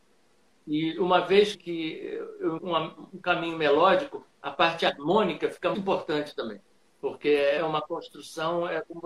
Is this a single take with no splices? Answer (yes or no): no